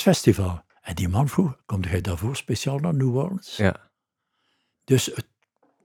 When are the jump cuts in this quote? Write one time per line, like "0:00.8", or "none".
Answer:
none